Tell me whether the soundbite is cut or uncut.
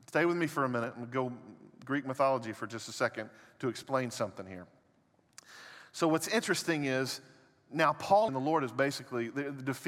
cut